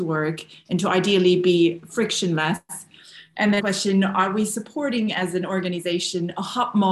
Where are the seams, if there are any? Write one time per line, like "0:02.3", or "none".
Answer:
0:03.6